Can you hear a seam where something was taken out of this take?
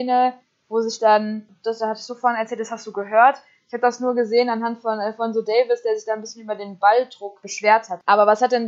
no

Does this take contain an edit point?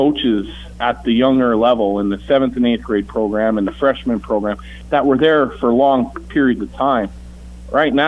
no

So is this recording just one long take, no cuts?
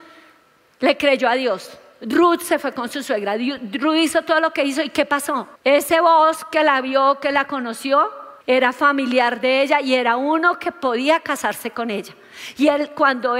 no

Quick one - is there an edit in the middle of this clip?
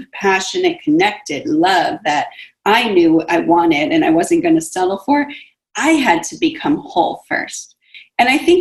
no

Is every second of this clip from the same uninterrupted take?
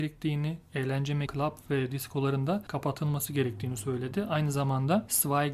no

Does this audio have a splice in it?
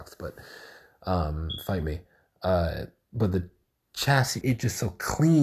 yes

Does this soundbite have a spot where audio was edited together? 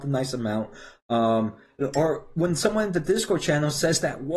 yes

